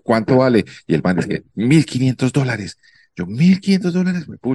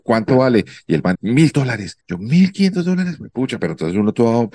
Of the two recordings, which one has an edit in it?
second; 3 cuts; at 1.1 s, 1.5 s, 2.0 s

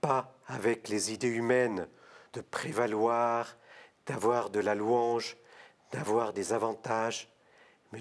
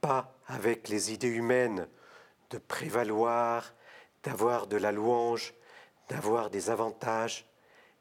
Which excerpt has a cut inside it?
first; 1 cut; at 2.3 s

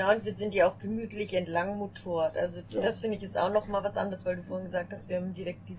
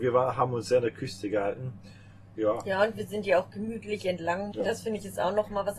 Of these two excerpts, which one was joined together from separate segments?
second; 1 cut; at 4.5 s

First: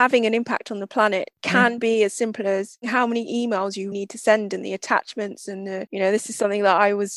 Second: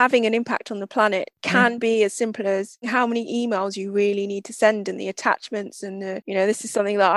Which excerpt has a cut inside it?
first; 1 cut; at 3.9 s

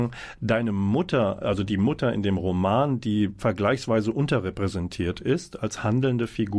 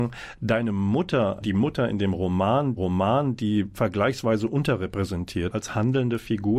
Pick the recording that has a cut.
second; 3 cuts; at 1.4 s, 2.8 s, 5.5 s

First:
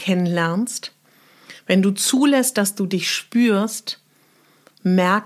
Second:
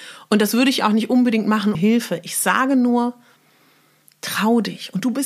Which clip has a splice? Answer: second; 1 cut; at 1.7 s

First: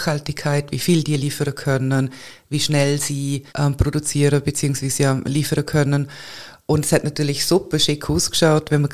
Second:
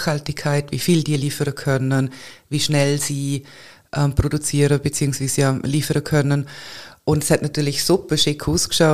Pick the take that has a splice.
first; 1 cut; at 3.5 s

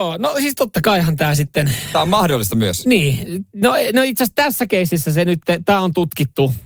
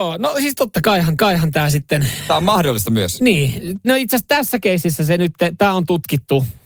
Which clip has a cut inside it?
second; 2 cuts; at 1.2 s, 3.8 s

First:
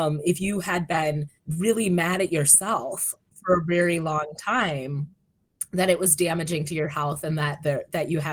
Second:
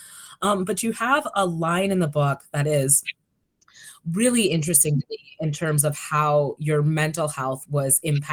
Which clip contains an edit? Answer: first; 1 cut; at 1.4 s

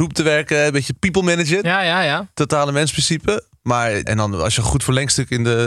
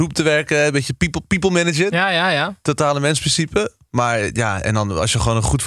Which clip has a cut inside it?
first; 3 cuts; at 0.9 s, 4.1 s, 4.6 s

